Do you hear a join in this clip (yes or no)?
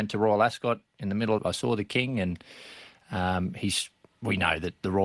yes